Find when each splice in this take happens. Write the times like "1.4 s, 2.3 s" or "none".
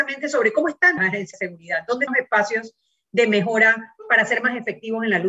1.0 s, 1.3 s, 2.1 s